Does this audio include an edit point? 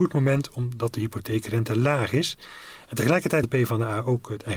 yes; 1 cut; at 3.4 s

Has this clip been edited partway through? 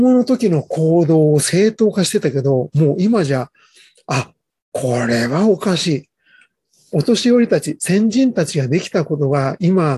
no; 0 cuts

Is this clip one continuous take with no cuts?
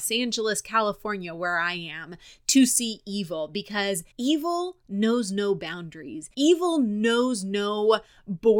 no; 2 cuts; at 4.1 s, 6.3 s

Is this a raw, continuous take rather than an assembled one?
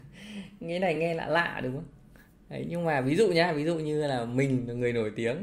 yes; 0 cuts

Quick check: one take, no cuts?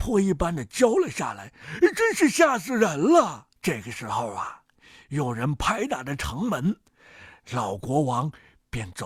no; 1 cut; at 3.6 s

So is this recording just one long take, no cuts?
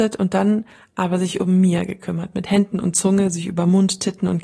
yes; 0 cuts

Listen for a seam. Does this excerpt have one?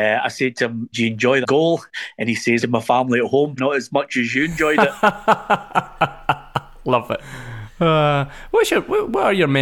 yes; 4 cuts; at 0.9 s, 1.4 s, 2.6 s, 3.6 s

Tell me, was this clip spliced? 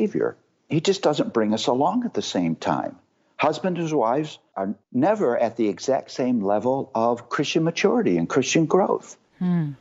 no; 0 cuts

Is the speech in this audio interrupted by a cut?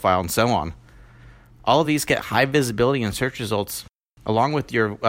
no; 0 cuts

